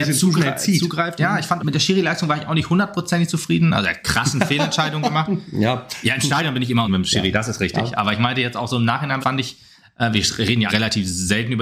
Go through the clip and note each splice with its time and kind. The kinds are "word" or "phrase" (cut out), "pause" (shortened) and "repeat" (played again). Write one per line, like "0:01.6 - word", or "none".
0:01.6 - word
0:04.0 - word
0:06.9 - word
0:09.2 - word
0:10.7 - word